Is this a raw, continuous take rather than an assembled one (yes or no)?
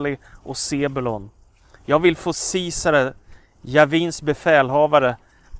yes